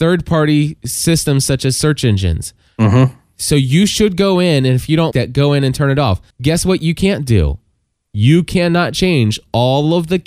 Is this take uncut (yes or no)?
no